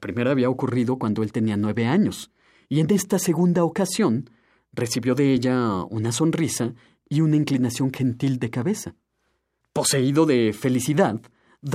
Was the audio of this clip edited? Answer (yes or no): no